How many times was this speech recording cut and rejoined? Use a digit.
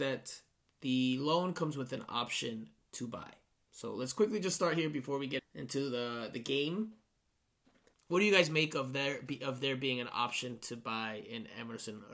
1